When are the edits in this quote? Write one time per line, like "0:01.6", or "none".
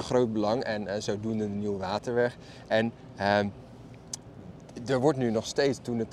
none